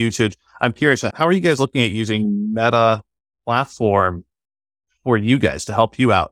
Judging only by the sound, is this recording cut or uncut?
uncut